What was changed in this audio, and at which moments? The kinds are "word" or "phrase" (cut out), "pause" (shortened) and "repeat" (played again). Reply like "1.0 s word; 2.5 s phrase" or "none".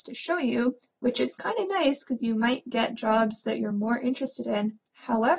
none